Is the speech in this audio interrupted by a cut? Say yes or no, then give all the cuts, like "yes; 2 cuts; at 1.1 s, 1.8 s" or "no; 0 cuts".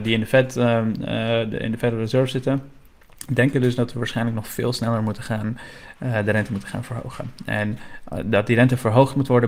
no; 0 cuts